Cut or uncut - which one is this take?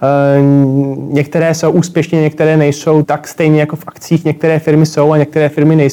cut